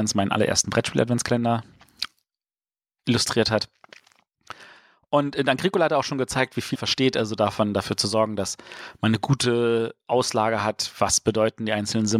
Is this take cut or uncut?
cut